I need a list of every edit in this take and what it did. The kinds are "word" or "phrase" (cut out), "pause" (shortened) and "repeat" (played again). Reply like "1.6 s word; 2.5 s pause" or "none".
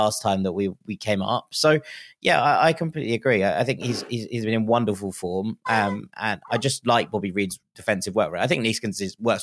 none